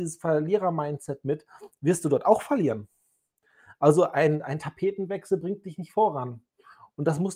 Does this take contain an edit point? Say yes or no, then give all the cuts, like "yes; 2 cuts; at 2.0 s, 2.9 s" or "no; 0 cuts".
no; 0 cuts